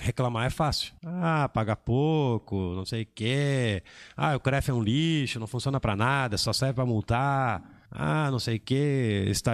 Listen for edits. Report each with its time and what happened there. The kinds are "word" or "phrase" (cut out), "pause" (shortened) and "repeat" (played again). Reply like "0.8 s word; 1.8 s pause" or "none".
1.0 s pause; 7.9 s pause

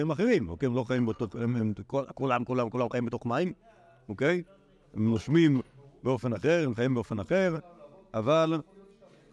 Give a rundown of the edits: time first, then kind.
none

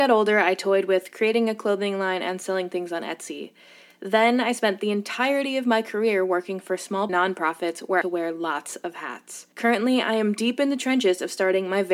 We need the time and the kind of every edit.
7.1 s phrase; 8.0 s phrase; 9.5 s pause

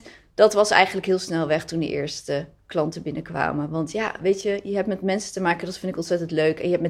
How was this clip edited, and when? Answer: none

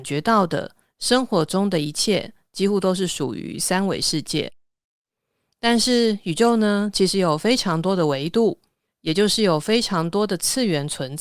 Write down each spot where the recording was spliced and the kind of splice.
none

